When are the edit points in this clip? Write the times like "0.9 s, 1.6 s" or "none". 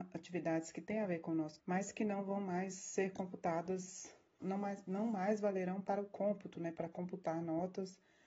1.6 s, 4.4 s